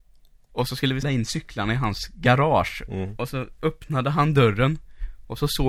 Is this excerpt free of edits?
no; 1 cut; at 1.0 s

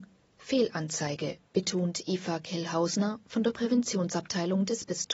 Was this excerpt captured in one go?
no; 1 cut; at 1.5 s

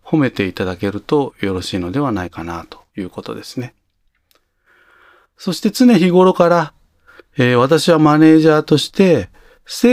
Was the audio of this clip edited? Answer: yes; 1 cut; at 2.9 s

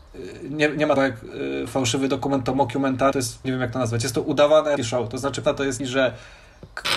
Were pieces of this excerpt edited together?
yes; 6 cuts; at 1.0 s, 3.1 s, 3.4 s, 4.8 s, 5.4 s, 5.8 s

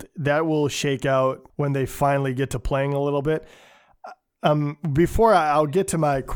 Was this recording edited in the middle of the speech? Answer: yes; 1 cut; at 1.5 s

